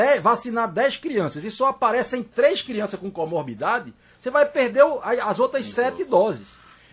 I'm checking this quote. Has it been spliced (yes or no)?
no